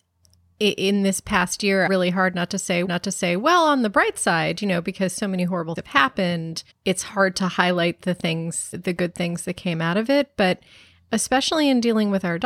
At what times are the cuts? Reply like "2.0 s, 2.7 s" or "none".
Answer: 1.9 s, 2.9 s, 5.8 s, 6.7 s, 8.7 s